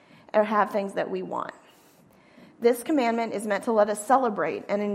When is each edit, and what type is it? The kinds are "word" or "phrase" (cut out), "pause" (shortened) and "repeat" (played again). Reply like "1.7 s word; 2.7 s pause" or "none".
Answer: none